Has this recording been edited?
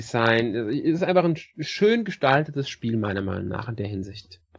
no; 0 cuts

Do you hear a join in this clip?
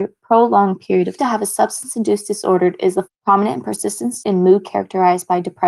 yes; 3 cuts; at 1.2 s, 3.0 s, 4.2 s

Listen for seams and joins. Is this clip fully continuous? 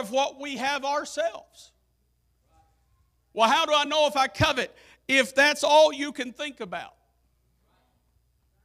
yes; 0 cuts

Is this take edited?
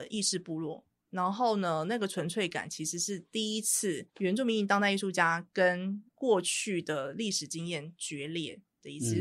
yes; 2 cuts; at 4.1 s, 6.1 s

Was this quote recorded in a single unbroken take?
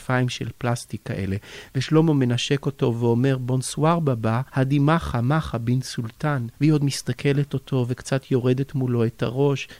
no; 2 cuts; at 4.5 s, 6.5 s

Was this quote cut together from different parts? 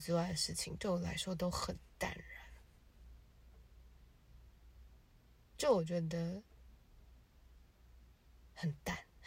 no; 0 cuts

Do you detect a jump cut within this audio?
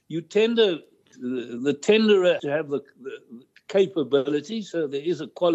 yes; 3 cuts; at 1.1 s, 1.6 s, 2.4 s

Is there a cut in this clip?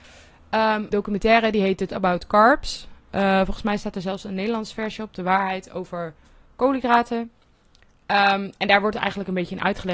yes; 2 cuts; at 0.9 s, 1.9 s

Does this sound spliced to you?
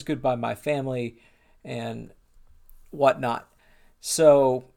no; 0 cuts

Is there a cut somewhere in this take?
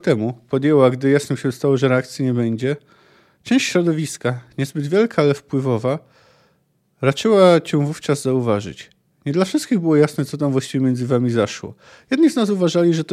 no; 0 cuts

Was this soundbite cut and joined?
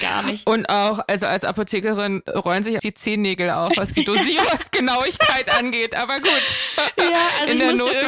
yes; 1 cut; at 2.8 s

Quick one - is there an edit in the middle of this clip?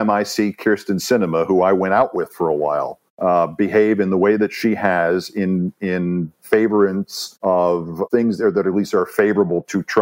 no; 0 cuts

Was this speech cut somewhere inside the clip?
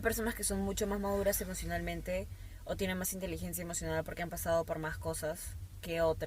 no; 0 cuts

